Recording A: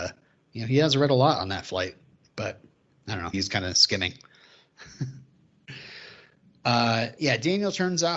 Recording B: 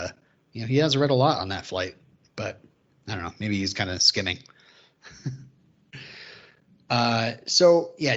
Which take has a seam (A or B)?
A